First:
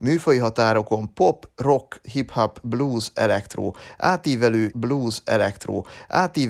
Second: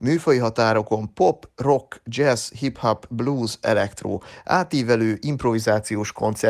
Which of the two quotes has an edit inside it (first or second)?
first